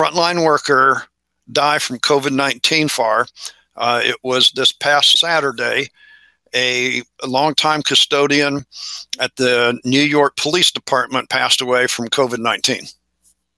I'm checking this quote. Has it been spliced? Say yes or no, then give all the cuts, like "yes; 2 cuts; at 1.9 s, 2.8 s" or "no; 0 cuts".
yes; 1 cut; at 2.9 s